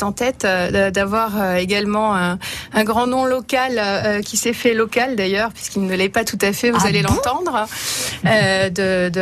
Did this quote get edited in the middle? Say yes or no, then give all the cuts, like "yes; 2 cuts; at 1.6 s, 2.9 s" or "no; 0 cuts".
no; 0 cuts